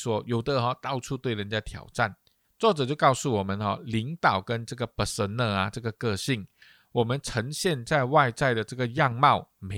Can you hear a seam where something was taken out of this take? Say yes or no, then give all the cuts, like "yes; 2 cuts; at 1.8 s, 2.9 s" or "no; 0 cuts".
no; 0 cuts